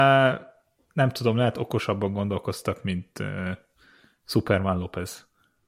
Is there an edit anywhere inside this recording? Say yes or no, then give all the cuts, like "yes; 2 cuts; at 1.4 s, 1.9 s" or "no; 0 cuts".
no; 0 cuts